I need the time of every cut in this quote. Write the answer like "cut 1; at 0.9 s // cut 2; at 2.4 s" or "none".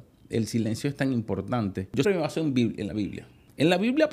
cut 1; at 2.0 s

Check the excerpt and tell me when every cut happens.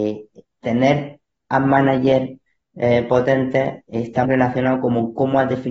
cut 1; at 4.2 s

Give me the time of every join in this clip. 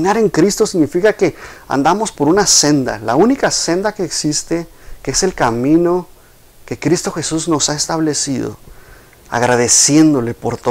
none

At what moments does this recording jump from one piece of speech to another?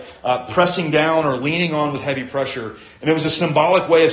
none

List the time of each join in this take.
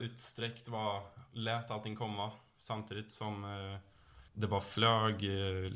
cut 1; at 4.3 s

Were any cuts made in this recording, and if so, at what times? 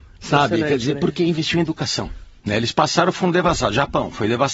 cut 1; at 2.4 s

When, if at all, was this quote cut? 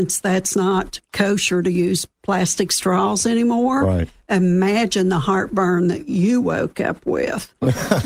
none

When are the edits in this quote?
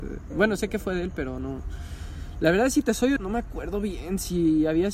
cut 1; at 3.2 s

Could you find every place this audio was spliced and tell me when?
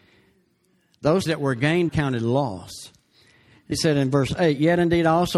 cut 1; at 1.3 s // cut 2; at 1.9 s // cut 3; at 3.7 s

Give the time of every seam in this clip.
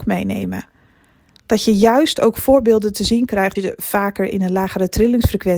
cut 1; at 3.6 s

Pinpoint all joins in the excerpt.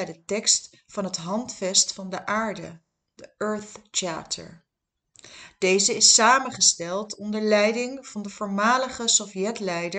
none

